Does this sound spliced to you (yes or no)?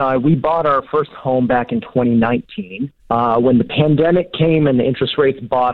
yes